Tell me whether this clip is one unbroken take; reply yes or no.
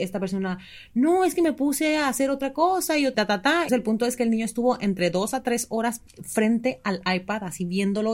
no